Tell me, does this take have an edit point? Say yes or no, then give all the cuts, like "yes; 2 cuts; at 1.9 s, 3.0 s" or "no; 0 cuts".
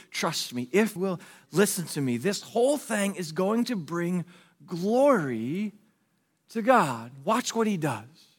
yes; 1 cut; at 1.0 s